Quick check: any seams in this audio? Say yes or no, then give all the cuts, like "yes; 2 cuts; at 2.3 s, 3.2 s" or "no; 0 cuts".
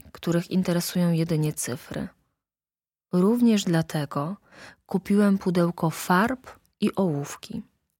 no; 0 cuts